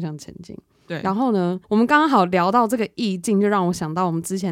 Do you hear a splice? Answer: yes; 1 cut; at 1.6 s

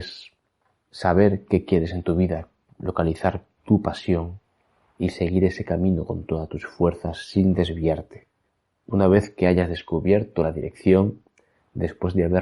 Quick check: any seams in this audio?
no; 0 cuts

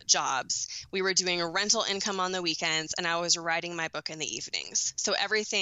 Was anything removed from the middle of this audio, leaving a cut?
no; 0 cuts

